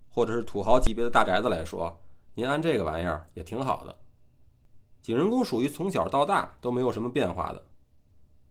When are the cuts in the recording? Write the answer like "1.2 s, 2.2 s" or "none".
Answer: 4.9 s